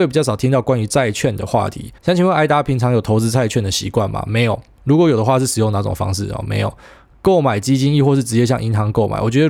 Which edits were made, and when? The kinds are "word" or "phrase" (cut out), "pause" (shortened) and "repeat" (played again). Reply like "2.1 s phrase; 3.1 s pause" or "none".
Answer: 2.0 s pause